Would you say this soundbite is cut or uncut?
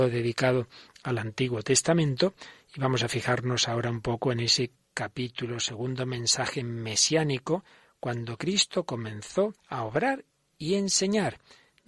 cut